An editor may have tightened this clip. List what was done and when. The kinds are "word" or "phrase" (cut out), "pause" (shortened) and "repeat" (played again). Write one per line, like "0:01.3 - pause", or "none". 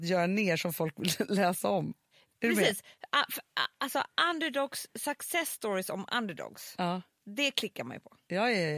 none